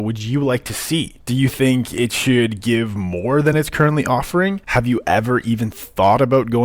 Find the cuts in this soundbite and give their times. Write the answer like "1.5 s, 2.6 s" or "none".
none